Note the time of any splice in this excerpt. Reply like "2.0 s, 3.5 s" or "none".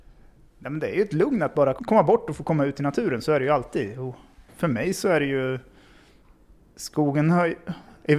1.8 s

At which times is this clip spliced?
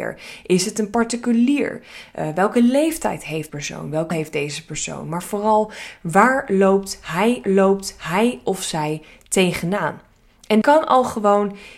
3.5 s, 4.1 s, 7.4 s, 10.6 s

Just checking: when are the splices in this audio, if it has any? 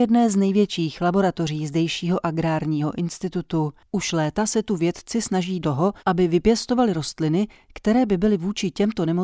5.6 s, 6.0 s

